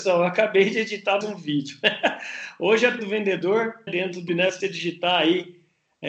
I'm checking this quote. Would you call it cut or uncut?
cut